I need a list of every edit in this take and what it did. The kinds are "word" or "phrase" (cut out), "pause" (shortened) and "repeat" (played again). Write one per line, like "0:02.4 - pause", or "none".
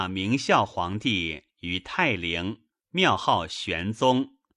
0:02.7 - pause